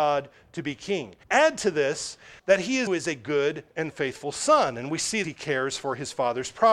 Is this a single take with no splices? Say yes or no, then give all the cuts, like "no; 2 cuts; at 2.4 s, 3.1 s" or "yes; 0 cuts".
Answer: no; 4 cuts; at 1.2 s, 2.4 s, 2.9 s, 5.2 s